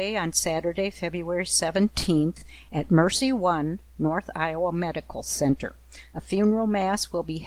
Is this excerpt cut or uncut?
uncut